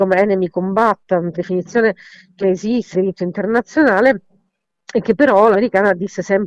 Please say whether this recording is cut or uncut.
cut